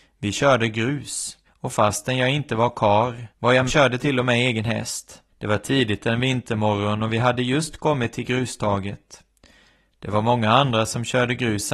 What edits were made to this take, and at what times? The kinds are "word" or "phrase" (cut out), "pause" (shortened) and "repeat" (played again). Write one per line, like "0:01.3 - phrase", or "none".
0:01.5 - pause
0:03.3 - pause
0:03.7 - phrase
0:05.3 - pause